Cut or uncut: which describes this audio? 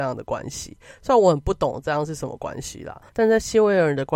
cut